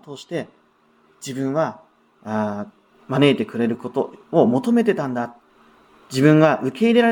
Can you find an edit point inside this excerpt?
no; 0 cuts

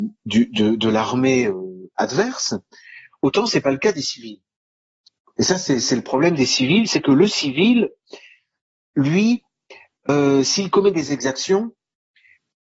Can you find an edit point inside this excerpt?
no; 0 cuts

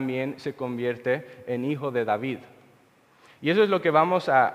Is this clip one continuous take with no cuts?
yes; 0 cuts

